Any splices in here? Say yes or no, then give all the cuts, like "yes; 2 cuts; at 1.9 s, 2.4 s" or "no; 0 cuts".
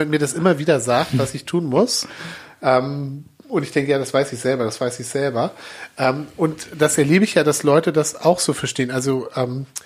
no; 0 cuts